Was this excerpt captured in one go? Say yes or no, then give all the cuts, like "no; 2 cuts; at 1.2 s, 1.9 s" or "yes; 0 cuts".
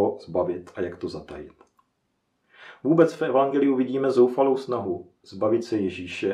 no; 1 cut; at 5.2 s